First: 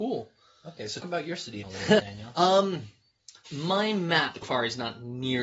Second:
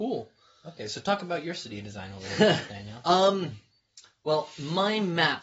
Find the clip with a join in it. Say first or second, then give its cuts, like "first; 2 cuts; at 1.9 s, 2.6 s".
first; 5 cuts; at 1.0 s, 1.6 s, 2.0 s, 3.5 s, 4.4 s